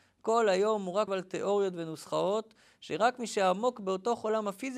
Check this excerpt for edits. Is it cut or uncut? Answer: cut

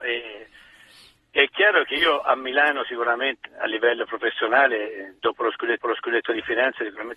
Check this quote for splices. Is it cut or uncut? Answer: cut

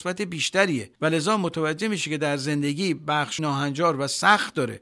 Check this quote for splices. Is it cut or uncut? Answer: cut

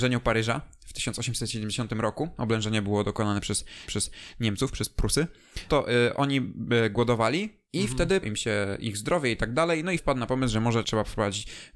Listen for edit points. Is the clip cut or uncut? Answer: cut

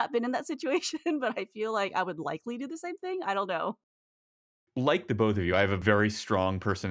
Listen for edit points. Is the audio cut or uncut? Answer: uncut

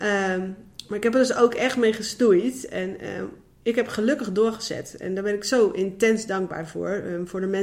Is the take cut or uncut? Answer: uncut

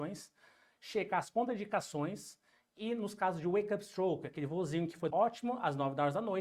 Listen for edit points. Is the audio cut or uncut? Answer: cut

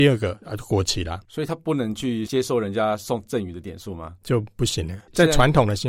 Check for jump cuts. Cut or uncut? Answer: cut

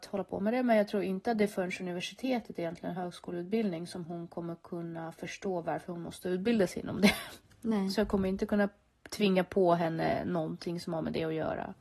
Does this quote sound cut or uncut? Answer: uncut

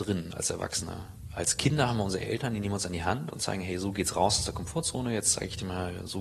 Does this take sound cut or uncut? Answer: uncut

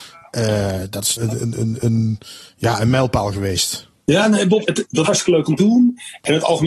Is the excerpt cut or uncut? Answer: cut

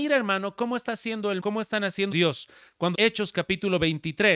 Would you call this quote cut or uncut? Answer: cut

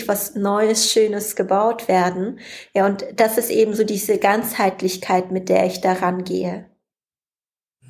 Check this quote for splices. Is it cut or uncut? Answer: uncut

